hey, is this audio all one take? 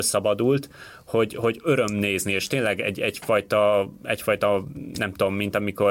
yes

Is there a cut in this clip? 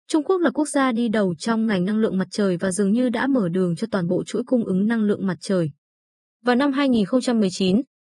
no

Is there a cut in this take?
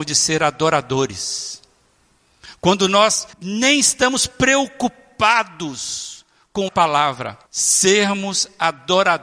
yes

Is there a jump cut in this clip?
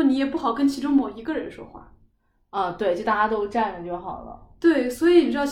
no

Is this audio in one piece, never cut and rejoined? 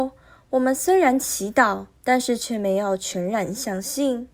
no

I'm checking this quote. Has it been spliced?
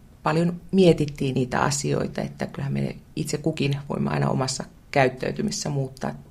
yes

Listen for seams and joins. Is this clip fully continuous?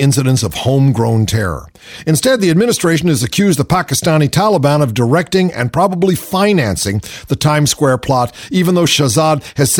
yes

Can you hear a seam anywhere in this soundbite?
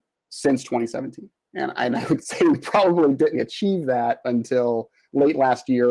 yes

